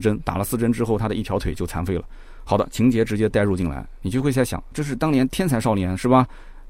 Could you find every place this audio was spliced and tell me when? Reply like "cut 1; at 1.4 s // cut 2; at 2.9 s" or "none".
cut 1; at 4.7 s